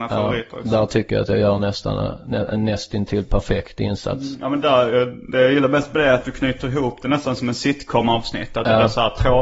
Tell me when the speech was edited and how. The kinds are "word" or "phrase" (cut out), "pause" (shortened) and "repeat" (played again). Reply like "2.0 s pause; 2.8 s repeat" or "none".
none